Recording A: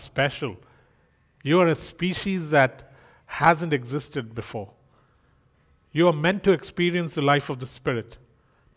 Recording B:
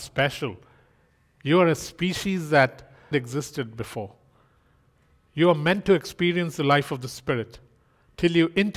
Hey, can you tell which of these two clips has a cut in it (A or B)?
B